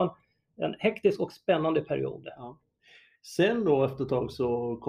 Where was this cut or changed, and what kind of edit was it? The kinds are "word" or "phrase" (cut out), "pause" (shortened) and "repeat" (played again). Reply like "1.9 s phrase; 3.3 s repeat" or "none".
none